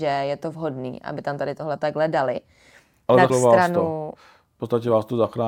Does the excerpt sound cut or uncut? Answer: cut